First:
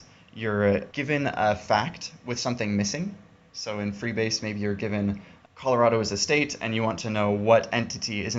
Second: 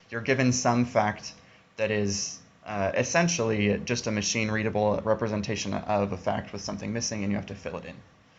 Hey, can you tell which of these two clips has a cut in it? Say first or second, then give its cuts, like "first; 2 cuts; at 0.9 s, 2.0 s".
first; 1 cut; at 0.9 s